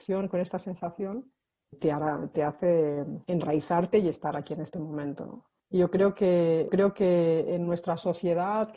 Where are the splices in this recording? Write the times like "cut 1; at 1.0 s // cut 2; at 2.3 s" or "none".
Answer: cut 1; at 1.7 s // cut 2; at 3.2 s // cut 3; at 5.6 s // cut 4; at 6.7 s